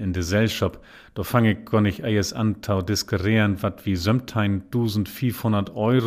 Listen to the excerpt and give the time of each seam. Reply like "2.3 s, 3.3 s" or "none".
none